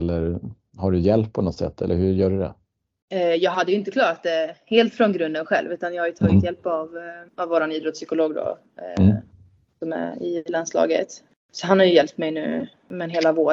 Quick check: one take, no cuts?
no; 1 cut; at 7.3 s

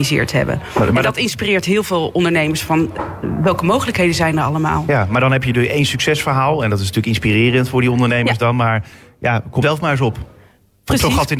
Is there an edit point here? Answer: yes; 1 cut; at 9.6 s

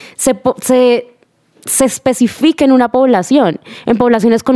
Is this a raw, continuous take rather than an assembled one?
yes; 0 cuts

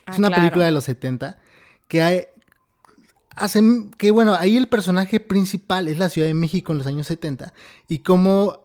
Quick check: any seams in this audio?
no; 0 cuts

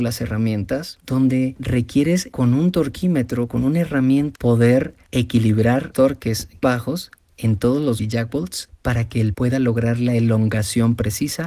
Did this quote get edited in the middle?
yes; 5 cuts; at 4.3 s, 5.9 s, 6.6 s, 8.0 s, 9.3 s

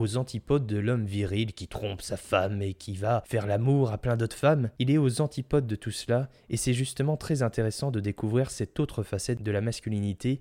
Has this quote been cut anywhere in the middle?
no; 0 cuts

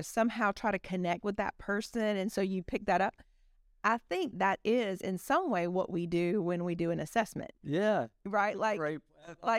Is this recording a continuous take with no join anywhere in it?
no; 1 cut; at 4.3 s

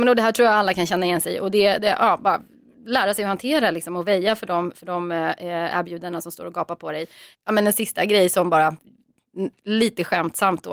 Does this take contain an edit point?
no; 0 cuts

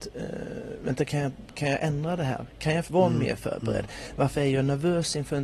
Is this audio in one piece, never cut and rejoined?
no; 1 cut; at 2.9 s

